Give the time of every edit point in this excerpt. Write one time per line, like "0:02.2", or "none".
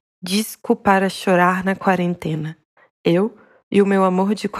none